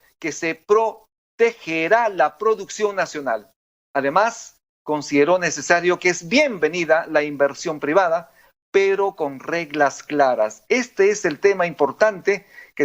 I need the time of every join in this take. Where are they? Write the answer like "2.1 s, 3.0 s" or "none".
none